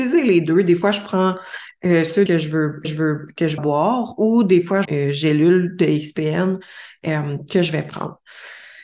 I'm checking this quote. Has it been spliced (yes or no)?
yes